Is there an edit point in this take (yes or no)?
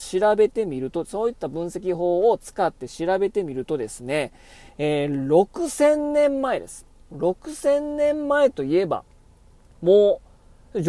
no